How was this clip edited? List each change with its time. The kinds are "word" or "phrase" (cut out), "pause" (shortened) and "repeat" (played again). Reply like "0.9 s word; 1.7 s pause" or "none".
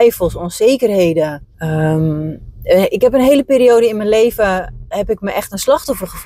1.5 s pause